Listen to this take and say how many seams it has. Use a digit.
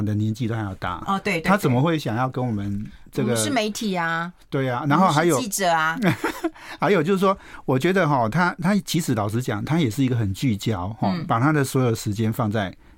0